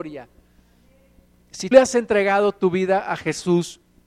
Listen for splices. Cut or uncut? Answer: cut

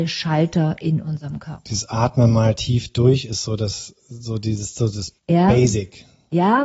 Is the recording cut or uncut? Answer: cut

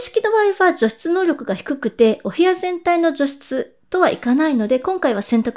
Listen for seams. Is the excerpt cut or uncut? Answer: uncut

